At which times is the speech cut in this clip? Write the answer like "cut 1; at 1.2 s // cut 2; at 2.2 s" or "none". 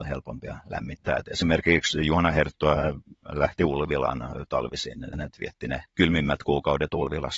cut 1; at 5.1 s // cut 2; at 5.9 s